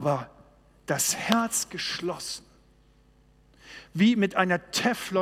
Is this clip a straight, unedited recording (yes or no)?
yes